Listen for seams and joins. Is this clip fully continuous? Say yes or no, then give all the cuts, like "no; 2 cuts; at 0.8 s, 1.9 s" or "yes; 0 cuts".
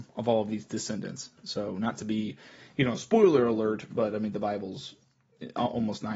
yes; 0 cuts